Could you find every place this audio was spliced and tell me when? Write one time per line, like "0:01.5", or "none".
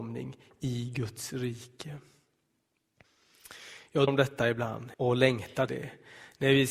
0:04.1
0:04.9
0:05.7